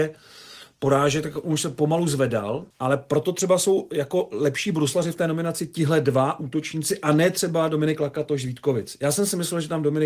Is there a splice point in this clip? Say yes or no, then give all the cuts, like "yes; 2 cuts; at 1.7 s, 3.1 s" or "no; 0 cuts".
yes; 1 cut; at 2.7 s